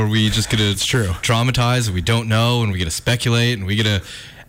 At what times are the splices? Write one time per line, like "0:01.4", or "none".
none